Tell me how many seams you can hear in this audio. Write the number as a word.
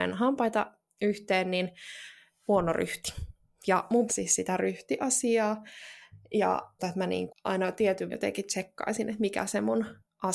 five